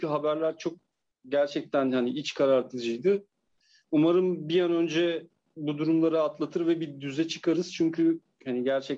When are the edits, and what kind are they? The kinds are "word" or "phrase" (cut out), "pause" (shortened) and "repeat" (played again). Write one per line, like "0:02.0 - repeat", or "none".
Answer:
none